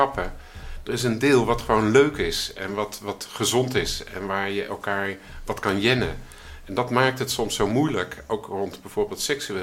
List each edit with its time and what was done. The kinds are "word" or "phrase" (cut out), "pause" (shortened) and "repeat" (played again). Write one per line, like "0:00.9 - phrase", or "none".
none